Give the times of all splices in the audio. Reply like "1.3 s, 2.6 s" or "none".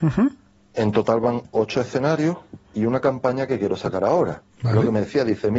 2.6 s, 4.5 s